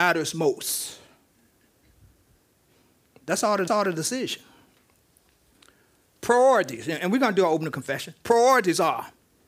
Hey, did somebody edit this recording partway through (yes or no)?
yes